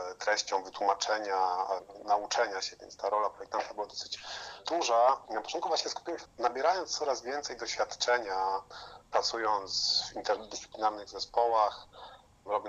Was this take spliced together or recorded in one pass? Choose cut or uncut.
cut